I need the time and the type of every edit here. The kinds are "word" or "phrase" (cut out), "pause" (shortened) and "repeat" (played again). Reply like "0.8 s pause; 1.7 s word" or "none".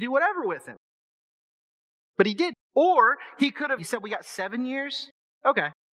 2.6 s pause; 3.8 s phrase

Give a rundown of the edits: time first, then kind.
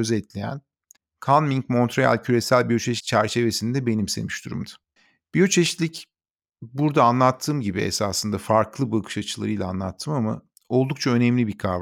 1.0 s pause; 5.0 s pause

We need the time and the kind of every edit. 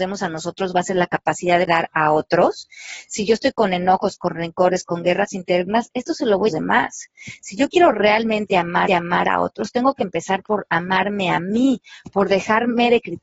1.7 s word; 6.5 s phrase; 8.9 s repeat

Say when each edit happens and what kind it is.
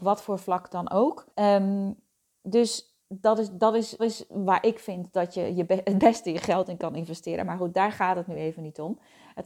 1.3 s pause; 3.0 s pause; 4.0 s repeat

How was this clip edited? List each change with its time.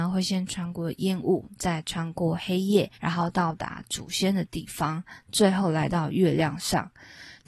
2.9 s pause

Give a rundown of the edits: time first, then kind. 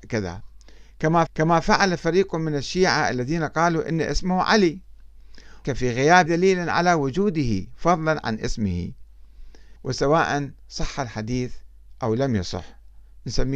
1.3 s repeat; 5.6 s word; 6.3 s word; 9.8 s pause

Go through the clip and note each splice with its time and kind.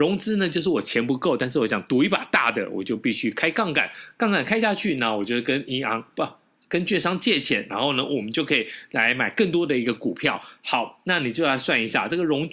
none

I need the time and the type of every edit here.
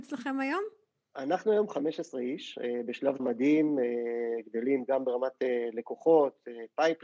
3.2 s word

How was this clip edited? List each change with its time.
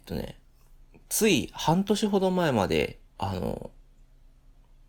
3.1 s pause

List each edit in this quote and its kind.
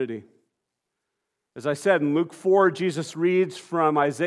none

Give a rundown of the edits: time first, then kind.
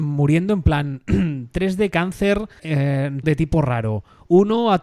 2.6 s word; 3.2 s word

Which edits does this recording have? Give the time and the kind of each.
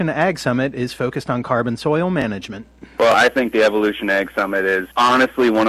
none

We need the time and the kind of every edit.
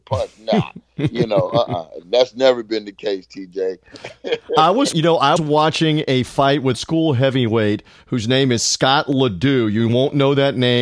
4.9 s word; 5.4 s word; 6.7 s phrase

